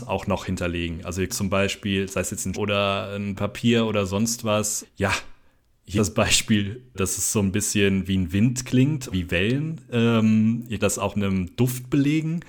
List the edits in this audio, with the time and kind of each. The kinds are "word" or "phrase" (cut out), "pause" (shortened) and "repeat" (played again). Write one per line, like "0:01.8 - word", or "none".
0:01.3 - word
0:02.5 - word
0:03.4 - word
0:04.8 - word
0:06.0 - word
0:06.9 - word
0:09.1 - word
0:10.8 - word
0:11.1 - word